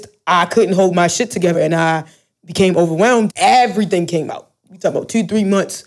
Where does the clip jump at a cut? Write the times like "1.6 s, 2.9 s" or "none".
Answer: 1.5 s, 3.3 s